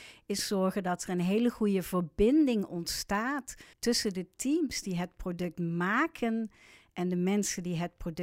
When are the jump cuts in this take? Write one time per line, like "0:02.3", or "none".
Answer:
0:03.7